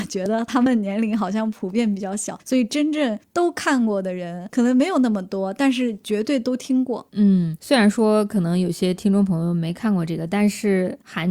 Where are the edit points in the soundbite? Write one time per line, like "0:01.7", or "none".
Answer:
none

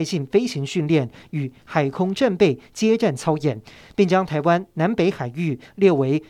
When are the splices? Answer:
none

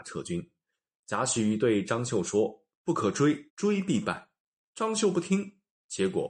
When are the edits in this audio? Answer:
0:03.5

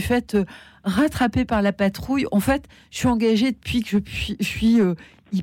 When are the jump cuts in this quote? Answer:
none

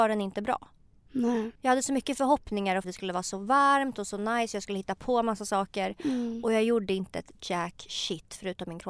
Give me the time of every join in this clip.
0:01.6
0:02.8

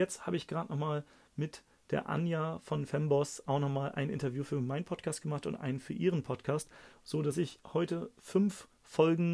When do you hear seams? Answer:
none

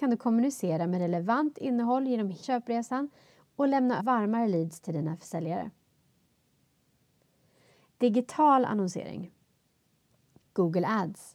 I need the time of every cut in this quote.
0:02.4
0:04.0

